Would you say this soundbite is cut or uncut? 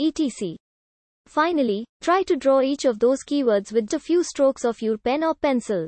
cut